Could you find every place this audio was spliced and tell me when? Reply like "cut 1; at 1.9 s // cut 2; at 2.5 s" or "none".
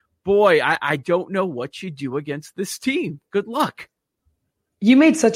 none